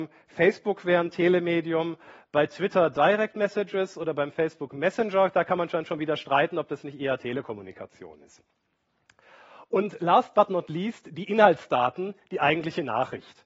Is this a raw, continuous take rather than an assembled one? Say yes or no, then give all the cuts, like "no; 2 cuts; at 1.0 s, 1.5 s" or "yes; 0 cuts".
yes; 0 cuts